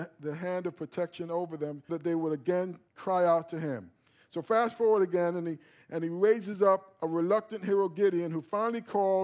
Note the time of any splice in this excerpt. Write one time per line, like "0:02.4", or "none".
0:01.9
0:02.9